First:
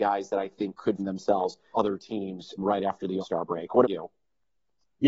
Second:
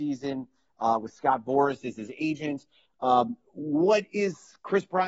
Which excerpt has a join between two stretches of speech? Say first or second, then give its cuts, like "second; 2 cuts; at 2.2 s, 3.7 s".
first; 5 cuts; at 1.0 s, 1.7 s, 2.6 s, 3.2 s, 3.8 s